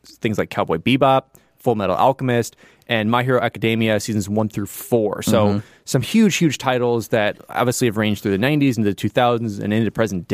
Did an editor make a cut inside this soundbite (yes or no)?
no